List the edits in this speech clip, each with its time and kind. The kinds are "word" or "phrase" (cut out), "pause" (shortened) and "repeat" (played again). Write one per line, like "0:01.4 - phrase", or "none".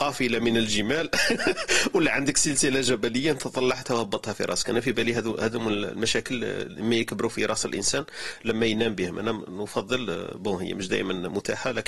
none